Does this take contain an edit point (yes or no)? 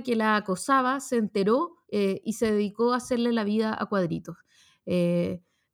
yes